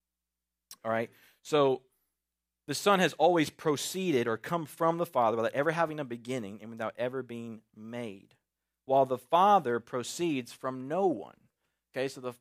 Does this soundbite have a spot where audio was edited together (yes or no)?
no